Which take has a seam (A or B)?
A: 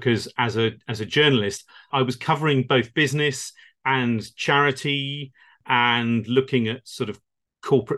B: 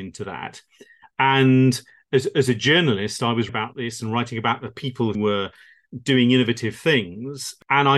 B